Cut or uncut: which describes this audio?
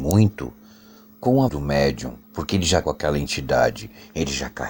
cut